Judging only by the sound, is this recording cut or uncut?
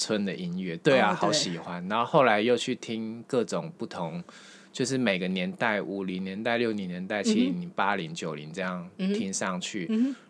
uncut